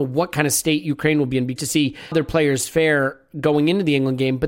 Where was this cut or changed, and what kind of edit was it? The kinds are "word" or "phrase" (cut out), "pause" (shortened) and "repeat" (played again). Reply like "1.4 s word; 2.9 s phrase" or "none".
1.6 s word; 2.1 s word